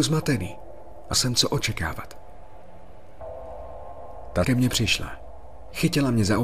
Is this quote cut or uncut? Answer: cut